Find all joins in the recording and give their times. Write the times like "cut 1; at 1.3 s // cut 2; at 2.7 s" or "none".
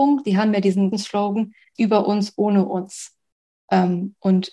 cut 1; at 0.9 s // cut 2; at 1.7 s